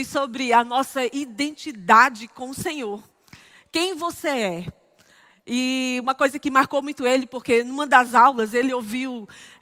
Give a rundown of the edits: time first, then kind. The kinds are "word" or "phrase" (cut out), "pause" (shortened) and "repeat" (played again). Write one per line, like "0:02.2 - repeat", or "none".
none